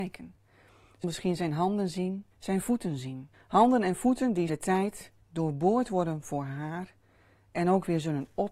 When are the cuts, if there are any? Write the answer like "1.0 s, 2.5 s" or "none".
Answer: 1.0 s, 2.3 s, 3.3 s, 4.5 s, 5.2 s